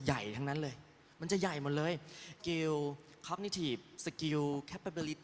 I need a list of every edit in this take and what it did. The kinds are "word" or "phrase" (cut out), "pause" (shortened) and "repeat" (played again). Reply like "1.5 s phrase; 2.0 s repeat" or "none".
2.4 s word